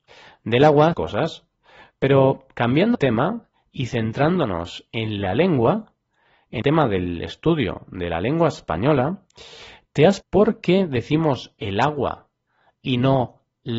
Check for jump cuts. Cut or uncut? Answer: cut